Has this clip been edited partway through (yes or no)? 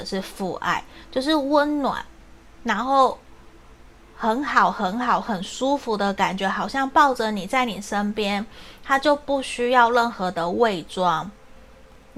no